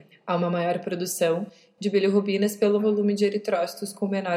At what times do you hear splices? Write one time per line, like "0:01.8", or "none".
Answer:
0:02.8